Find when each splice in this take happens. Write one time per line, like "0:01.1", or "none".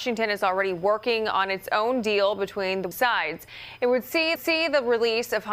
0:02.9
0:04.4